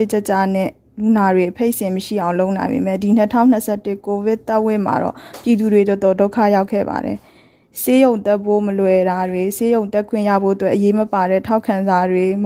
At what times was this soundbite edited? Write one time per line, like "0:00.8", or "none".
none